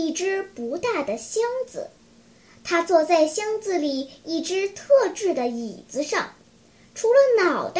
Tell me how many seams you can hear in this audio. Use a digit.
0